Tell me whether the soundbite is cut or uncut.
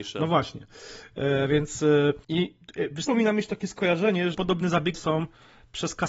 cut